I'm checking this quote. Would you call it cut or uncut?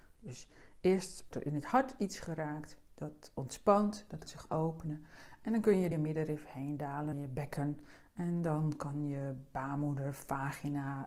cut